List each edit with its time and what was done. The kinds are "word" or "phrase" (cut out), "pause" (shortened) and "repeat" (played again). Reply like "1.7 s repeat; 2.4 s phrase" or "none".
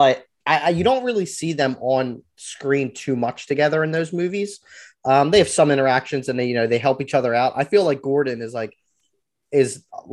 none